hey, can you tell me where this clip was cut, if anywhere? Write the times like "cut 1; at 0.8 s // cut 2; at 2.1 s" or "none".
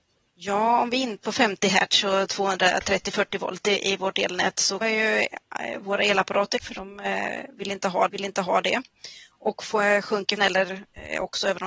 cut 1; at 1.2 s // cut 2; at 4.8 s // cut 3; at 6.6 s // cut 4; at 8.1 s // cut 5; at 10.4 s